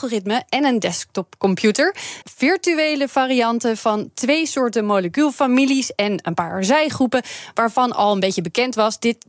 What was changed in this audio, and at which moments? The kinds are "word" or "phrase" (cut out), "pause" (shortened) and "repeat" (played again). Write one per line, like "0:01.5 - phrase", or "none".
0:02.2 - word